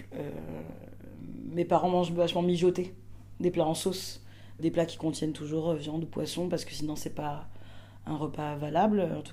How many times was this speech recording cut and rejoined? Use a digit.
1